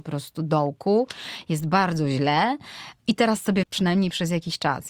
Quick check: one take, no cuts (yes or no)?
no